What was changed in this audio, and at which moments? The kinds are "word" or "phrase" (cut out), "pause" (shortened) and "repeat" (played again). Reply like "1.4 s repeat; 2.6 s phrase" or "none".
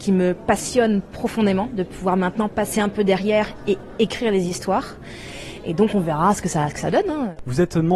none